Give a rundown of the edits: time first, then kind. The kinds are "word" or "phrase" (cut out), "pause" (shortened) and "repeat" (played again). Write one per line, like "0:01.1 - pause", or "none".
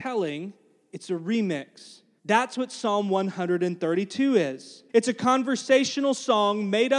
0:02.2 - pause
0:04.9 - pause